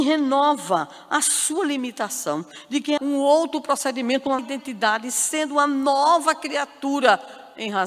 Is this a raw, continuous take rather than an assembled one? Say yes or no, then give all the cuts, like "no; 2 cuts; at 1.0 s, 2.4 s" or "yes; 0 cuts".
no; 2 cuts; at 3.0 s, 4.4 s